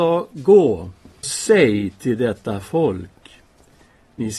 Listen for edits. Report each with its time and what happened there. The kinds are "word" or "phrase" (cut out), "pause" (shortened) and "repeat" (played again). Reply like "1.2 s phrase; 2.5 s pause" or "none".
1.2 s word